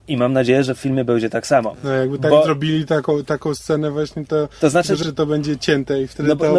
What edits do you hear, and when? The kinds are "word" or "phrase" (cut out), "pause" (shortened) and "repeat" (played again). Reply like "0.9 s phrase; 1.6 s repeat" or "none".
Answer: 5.0 s phrase